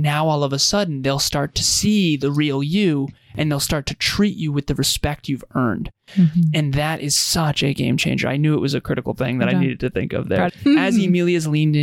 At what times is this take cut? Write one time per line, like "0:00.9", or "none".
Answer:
0:10.5